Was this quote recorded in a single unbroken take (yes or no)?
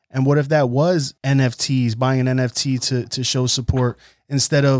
no